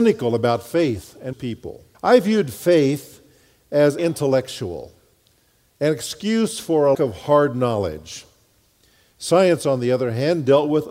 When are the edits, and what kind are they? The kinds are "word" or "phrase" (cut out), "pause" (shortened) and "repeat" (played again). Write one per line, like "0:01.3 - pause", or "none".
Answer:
0:01.3 - word
0:01.9 - pause
0:04.0 - word
0:06.9 - word